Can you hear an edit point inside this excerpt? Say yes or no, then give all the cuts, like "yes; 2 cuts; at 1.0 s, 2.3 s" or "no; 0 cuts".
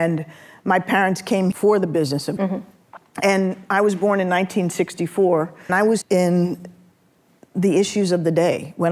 yes; 4 cuts; at 1.5 s, 2.4 s, 5.7 s, 6.0 s